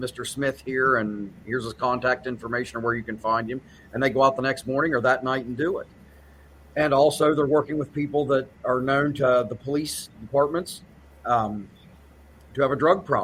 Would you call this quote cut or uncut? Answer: uncut